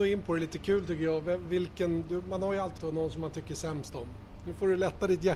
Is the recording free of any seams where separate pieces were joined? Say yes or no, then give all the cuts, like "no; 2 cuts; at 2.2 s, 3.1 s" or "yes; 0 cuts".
no; 1 cut; at 2.8 s